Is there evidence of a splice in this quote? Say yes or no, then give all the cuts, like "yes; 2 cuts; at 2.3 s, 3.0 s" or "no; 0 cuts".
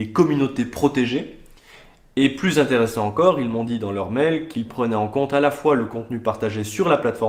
no; 0 cuts